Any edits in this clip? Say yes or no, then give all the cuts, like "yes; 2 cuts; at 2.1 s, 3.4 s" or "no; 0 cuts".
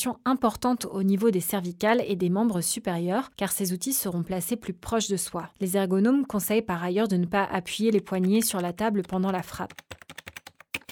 no; 0 cuts